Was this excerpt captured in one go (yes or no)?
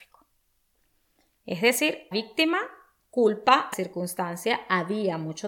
no